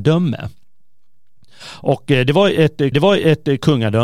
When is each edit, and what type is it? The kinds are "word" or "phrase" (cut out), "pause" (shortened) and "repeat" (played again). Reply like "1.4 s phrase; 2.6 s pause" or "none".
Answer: 2.9 s repeat